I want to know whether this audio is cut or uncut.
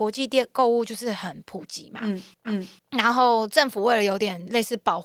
cut